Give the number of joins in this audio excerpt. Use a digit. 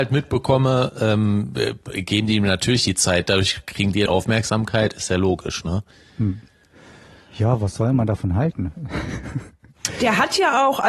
1